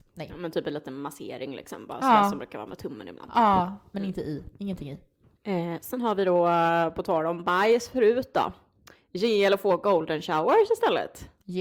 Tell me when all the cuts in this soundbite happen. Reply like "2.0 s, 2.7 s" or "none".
none